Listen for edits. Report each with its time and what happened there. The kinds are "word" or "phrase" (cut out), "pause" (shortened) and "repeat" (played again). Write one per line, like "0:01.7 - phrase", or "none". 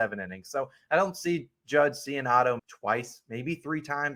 0:02.6 - word